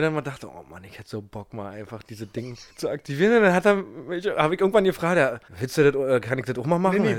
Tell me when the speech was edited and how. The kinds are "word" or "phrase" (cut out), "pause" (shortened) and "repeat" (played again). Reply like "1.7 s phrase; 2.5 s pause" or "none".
2.7 s pause; 5.5 s pause